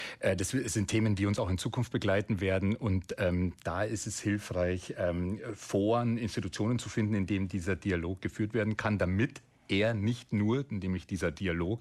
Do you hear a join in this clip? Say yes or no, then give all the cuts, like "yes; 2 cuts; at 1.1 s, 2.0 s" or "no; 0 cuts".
no; 0 cuts